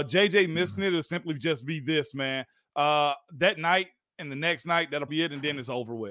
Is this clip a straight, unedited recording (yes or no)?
no